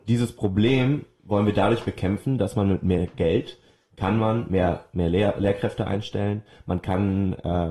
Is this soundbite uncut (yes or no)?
yes